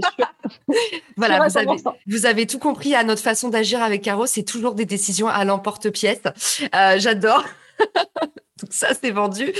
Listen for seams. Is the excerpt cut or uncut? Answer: cut